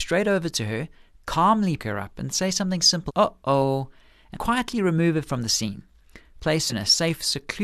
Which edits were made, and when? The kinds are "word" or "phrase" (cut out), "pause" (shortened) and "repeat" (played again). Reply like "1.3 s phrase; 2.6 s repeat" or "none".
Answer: 1.8 s word; 3.1 s word; 4.3 s word; 6.7 s word

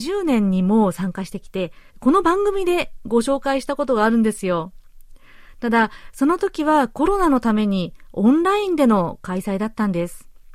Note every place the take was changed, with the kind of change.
1.9 s pause

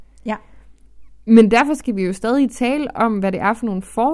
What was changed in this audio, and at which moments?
none

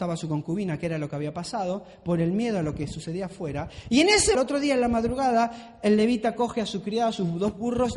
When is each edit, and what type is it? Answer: 4.3 s phrase

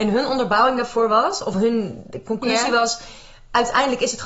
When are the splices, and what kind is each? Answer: none

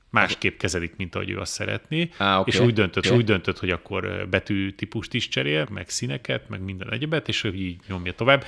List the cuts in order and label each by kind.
3.0 s repeat; 5.7 s word

